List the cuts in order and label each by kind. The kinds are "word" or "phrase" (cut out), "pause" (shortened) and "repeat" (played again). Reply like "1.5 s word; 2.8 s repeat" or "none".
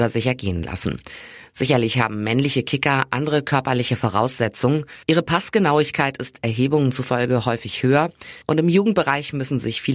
5.0 s pause; 8.4 s pause